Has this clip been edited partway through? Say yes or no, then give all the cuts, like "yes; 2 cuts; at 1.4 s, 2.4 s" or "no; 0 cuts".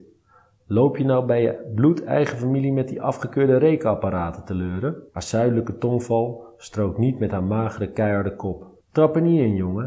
yes; 2 cuts; at 5.1 s, 8.8 s